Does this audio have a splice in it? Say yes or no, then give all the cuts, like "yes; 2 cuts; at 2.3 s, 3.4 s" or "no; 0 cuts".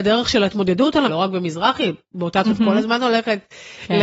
yes; 2 cuts; at 1.1 s, 2.4 s